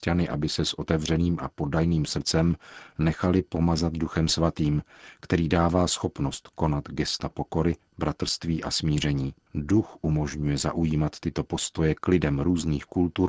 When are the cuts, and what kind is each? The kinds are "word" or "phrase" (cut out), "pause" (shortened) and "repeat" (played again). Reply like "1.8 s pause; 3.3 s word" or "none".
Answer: 9.4 s pause